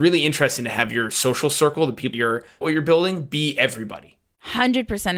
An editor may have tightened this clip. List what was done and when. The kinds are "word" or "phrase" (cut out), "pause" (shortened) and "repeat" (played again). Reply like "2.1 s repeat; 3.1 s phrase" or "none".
2.1 s word; 2.6 s phrase

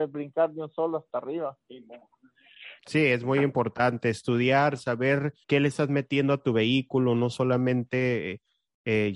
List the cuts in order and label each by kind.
2.8 s pause; 5.4 s pause

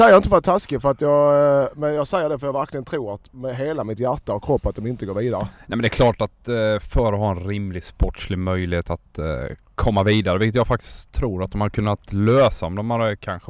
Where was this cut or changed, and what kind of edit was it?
none

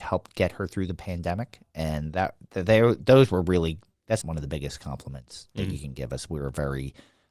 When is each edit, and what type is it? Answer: 4.2 s word

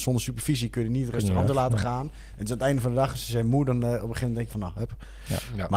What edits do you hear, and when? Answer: 4.5 s phrase

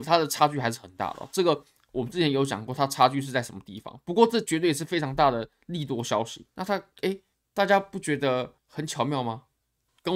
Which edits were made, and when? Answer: 7.3 s pause; 8.6 s pause

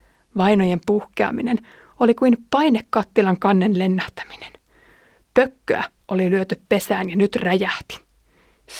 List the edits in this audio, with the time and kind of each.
none

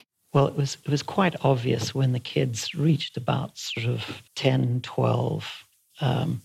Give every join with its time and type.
4.3 s pause

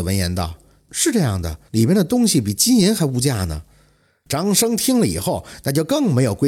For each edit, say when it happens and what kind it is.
1.7 s pause

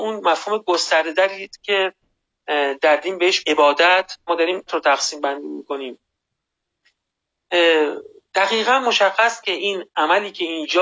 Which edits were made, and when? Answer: 1.6 s word; 3.4 s word; 4.3 s word; 4.7 s word; 9.4 s word

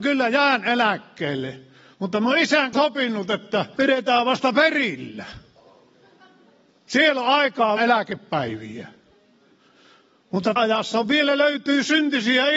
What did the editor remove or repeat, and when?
2.7 s word; 3.8 s word; 7.8 s word; 10.6 s word

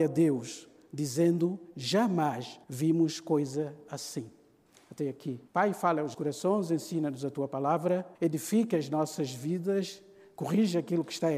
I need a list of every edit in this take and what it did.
2.6 s pause; 5.5 s pause; 6.1 s word; 8.2 s pause

